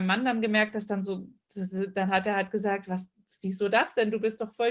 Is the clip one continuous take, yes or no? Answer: yes